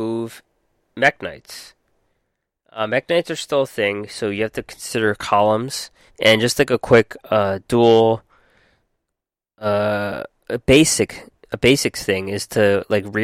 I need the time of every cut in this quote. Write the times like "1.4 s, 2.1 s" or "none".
6.1 s